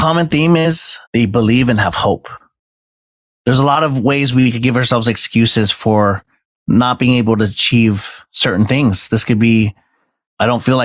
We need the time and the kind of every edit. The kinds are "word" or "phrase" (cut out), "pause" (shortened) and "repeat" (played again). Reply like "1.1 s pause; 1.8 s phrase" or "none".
1.1 s pause